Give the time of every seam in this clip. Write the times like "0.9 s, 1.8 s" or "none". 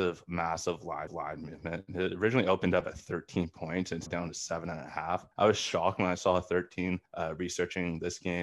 1.1 s, 4.1 s, 5.3 s, 7.1 s